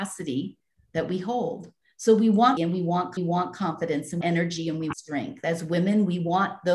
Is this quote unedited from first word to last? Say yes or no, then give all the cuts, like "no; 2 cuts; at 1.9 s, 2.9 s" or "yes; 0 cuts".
no; 5 cuts; at 1.8 s, 2.6 s, 3.2 s, 4.2 s, 4.9 s